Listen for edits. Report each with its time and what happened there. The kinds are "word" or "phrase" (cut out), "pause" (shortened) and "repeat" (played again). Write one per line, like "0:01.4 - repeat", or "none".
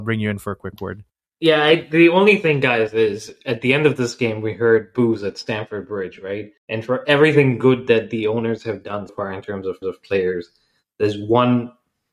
0:01.1 - pause
0:06.6 - pause
0:09.1 - word
0:09.8 - repeat

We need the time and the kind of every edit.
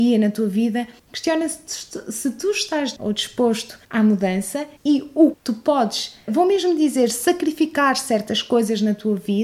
0:01.0 - pause
0:03.0 - word
0:03.8 - pause
0:04.8 - pause
0:05.3 - word
0:06.3 - word

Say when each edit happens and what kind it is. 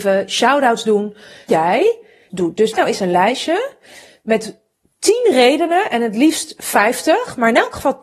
0:01.5 - word
0:02.3 - phrase
0:02.7 - word

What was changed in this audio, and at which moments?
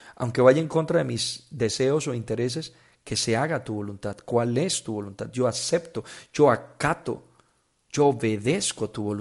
none

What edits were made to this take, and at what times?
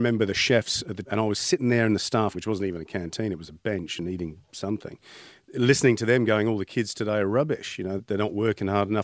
0:01.0 - word
0:02.3 - word
0:08.0 - word

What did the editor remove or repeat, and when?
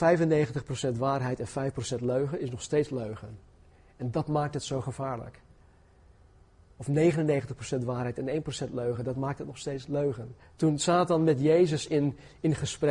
0:10.4 - pause

